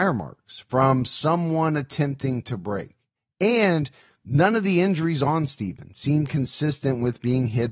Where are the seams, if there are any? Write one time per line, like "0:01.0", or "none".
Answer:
none